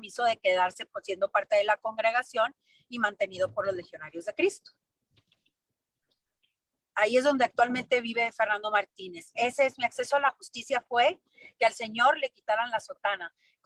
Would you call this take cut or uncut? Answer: uncut